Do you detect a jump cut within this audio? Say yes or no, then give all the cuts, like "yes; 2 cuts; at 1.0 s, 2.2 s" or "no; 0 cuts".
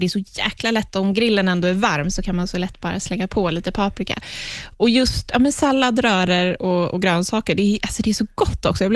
no; 0 cuts